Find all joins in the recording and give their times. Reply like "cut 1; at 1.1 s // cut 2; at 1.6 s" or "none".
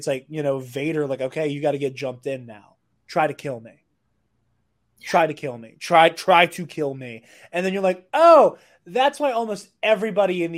none